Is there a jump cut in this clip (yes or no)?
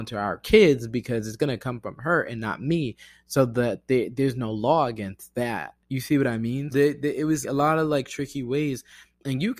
yes